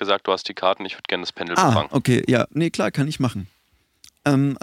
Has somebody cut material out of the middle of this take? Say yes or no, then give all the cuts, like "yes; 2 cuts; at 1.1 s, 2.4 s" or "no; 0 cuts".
no; 0 cuts